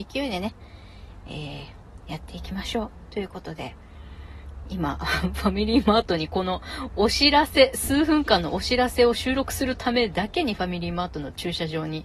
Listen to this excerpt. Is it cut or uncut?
uncut